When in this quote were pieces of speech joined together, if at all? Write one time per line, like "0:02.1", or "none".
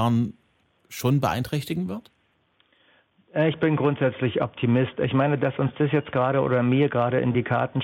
none